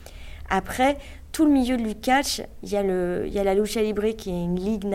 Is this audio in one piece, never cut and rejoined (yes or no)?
yes